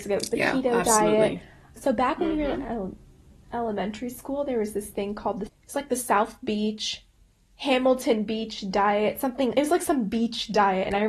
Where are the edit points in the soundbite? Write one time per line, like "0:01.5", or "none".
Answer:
0:01.8
0:05.5

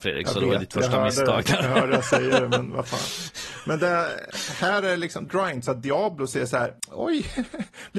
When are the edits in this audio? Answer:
0:05.3

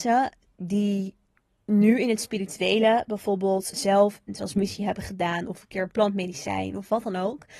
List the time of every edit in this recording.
0:03.7

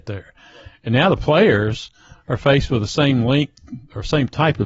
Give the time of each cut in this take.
none

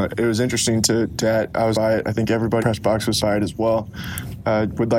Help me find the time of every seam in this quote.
0:01.2
0:01.7
0:02.6
0:03.2

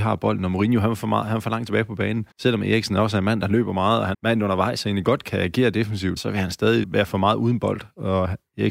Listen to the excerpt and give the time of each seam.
0:02.3
0:04.1
0:05.2
0:06.2
0:06.8

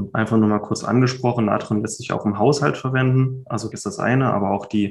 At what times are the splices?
0:03.7

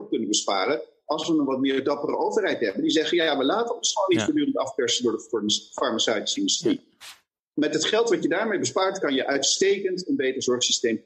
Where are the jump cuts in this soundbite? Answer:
none

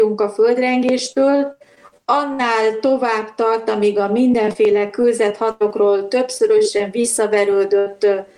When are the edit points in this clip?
none

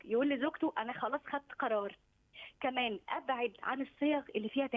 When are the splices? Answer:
none

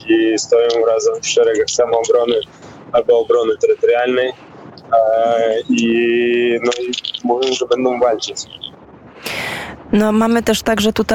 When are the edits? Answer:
none

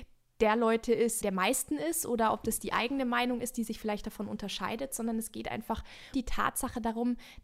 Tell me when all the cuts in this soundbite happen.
0:01.2
0:06.1

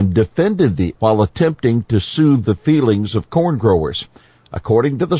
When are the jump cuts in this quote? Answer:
0:01.0

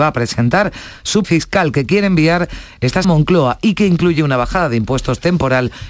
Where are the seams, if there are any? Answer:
0:01.2
0:03.0

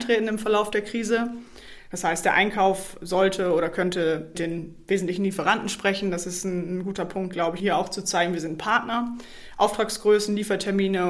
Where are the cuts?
0:04.3
0:07.6

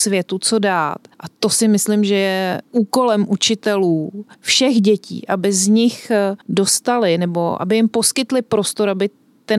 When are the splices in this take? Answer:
0:01.1
0:02.6
0:04.3
0:06.4

